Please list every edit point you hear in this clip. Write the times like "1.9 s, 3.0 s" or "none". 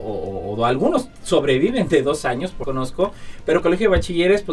2.6 s, 3.6 s